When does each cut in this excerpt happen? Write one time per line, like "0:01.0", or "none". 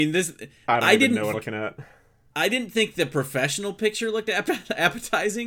0:01.3